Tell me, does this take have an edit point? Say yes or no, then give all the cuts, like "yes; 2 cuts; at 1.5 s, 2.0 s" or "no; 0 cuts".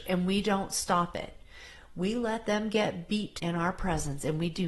yes; 1 cut; at 3.4 s